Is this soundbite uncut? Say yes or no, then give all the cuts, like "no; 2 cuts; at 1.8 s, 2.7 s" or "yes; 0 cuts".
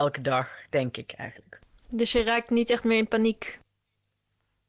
yes; 0 cuts